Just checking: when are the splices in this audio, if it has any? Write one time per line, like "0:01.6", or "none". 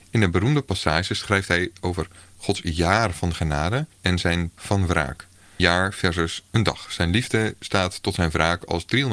0:03.9
0:04.6
0:05.6